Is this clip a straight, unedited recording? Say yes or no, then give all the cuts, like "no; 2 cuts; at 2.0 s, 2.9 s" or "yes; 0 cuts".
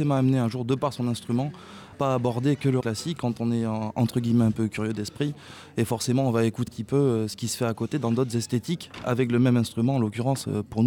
no; 3 cuts; at 1.9 s, 2.8 s, 6.7 s